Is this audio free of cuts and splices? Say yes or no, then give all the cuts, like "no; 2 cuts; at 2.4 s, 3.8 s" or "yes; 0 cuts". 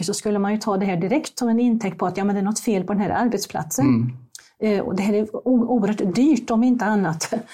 yes; 0 cuts